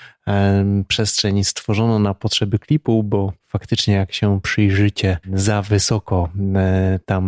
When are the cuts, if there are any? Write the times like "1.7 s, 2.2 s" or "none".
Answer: 5.2 s